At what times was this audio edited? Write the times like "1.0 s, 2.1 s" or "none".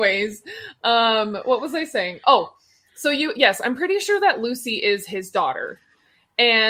none